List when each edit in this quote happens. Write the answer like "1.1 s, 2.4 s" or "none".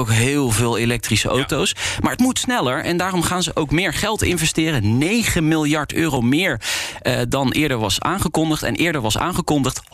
none